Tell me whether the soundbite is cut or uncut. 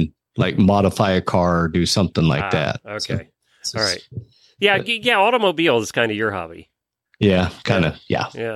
uncut